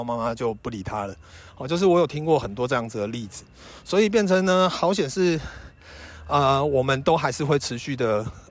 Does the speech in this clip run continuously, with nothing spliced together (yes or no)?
yes